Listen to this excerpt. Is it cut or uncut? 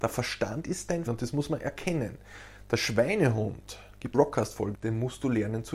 cut